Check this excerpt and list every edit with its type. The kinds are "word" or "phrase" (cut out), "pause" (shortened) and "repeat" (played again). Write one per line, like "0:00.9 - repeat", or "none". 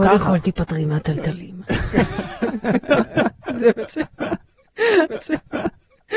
0:05.1 - repeat

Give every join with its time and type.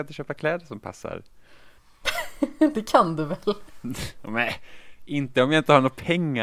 0:01.8 - pause

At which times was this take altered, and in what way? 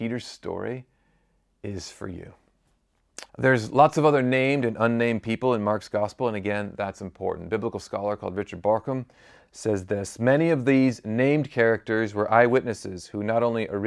0:03.3 - pause

